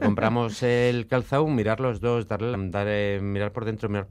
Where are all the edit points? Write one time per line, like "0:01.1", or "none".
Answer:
0:02.5